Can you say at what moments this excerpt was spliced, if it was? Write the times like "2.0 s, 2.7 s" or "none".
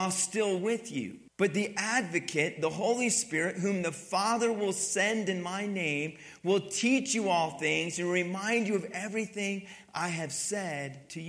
1.3 s